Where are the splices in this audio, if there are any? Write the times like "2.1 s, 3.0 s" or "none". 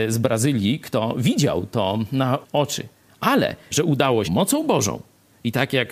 2.4 s, 3.7 s, 4.2 s

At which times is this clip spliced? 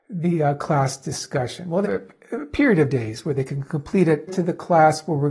1.8 s, 4.3 s

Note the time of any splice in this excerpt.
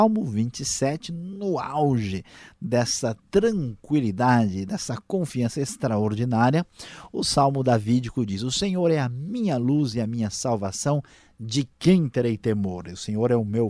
none

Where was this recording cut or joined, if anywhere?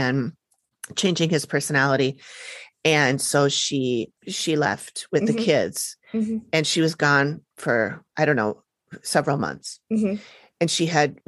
4.2 s, 7.5 s

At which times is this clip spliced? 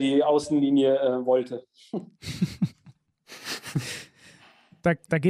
none

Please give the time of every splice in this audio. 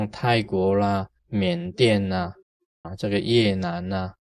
1.2 s, 2.8 s

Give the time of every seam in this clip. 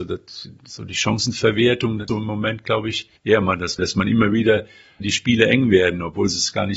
2.1 s, 3.2 s, 3.8 s, 5.0 s

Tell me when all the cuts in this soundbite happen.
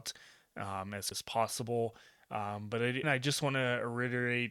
1.1 s, 3.0 s

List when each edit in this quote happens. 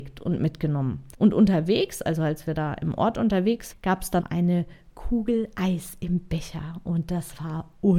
1.1 s, 3.7 s, 4.2 s

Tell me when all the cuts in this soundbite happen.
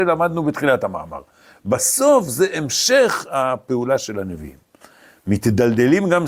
none

